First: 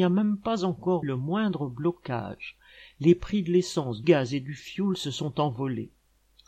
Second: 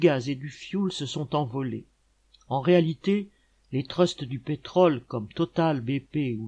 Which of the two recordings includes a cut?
first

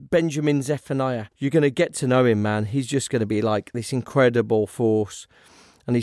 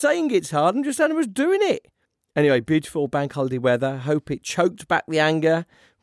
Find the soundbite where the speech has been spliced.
first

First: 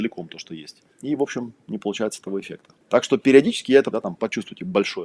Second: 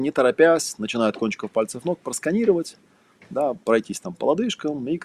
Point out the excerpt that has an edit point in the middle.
first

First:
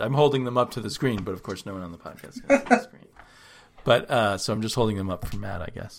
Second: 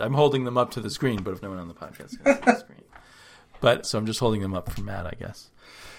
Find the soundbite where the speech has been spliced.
second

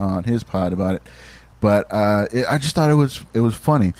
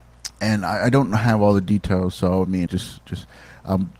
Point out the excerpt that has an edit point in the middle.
second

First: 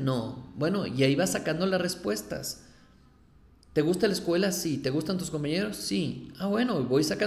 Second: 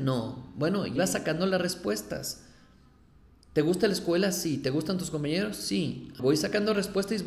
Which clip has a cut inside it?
second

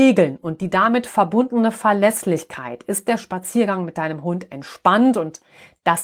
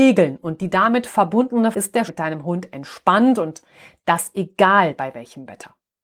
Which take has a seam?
second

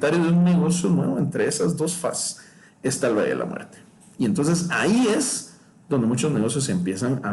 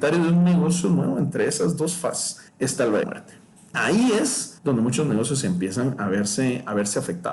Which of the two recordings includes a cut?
second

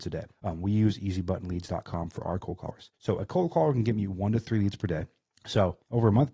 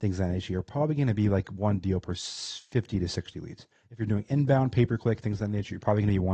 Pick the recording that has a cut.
first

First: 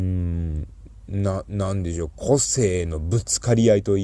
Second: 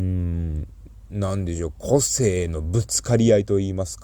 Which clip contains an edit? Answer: second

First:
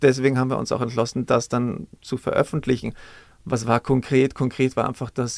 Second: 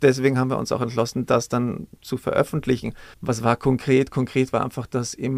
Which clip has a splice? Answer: second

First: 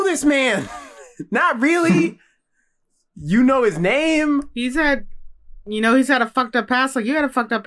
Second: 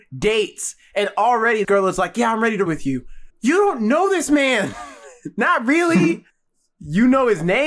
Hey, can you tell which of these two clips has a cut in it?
second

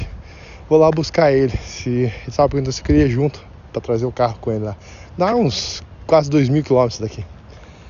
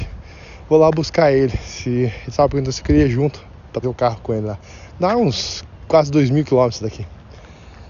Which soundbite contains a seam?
second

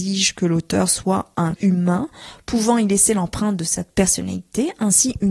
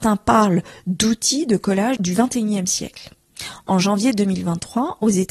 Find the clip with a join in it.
first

